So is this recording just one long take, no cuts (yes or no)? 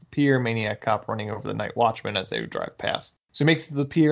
yes